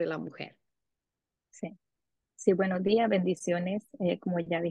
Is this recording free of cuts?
yes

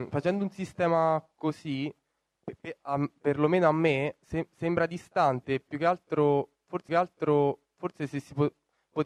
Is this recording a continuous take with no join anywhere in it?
no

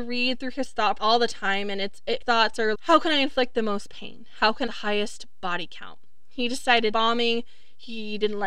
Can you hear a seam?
yes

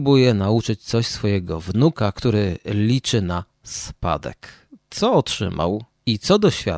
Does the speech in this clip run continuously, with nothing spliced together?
yes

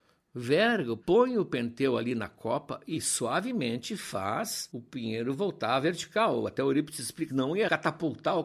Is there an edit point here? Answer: yes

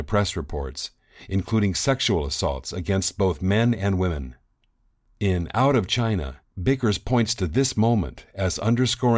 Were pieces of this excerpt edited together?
yes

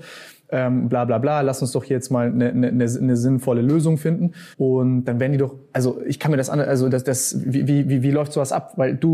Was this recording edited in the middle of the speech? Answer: yes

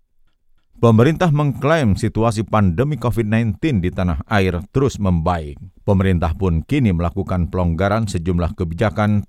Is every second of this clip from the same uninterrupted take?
no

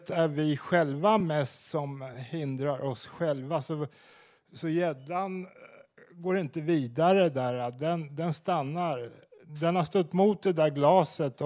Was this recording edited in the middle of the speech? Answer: no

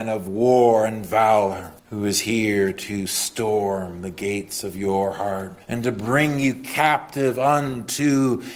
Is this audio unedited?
no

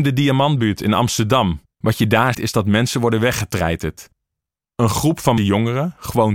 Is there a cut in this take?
yes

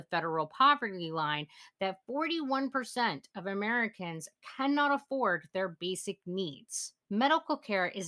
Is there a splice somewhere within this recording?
yes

